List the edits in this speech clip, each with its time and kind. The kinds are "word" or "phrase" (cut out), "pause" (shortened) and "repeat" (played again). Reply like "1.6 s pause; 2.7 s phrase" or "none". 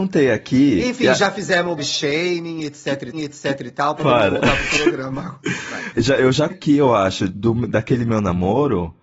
1.8 s word; 3.1 s repeat; 5.9 s word; 6.5 s word; 7.3 s word